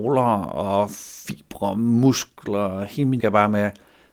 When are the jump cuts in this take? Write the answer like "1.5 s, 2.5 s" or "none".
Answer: 3.2 s